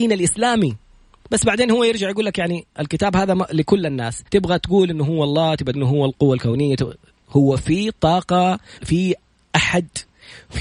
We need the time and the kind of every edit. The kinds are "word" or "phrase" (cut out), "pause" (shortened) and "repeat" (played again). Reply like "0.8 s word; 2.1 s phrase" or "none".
4.3 s pause; 5.7 s word; 8.8 s word